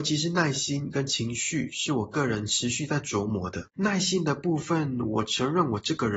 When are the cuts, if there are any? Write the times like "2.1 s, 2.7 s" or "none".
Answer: 3.7 s